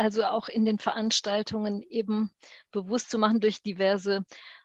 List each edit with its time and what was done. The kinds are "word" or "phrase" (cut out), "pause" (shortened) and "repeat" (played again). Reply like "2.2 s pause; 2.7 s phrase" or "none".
none